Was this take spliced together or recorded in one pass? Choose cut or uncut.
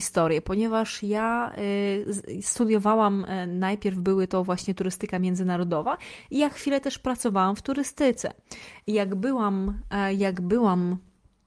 uncut